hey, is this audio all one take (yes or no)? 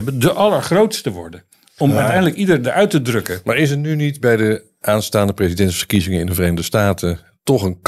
yes